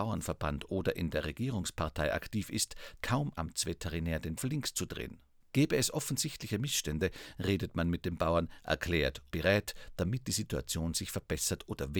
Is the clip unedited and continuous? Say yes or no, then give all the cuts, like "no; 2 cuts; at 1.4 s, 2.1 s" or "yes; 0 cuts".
no; 5 cuts; at 3.0 s, 3.3 s, 4.4 s, 5.4 s, 9.3 s